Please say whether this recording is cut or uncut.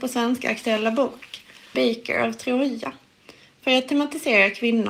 cut